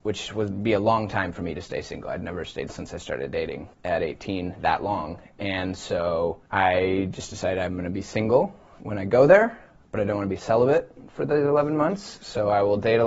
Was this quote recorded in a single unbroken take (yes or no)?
no